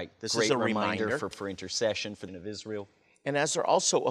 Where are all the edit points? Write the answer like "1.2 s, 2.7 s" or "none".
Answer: 1.3 s, 2.3 s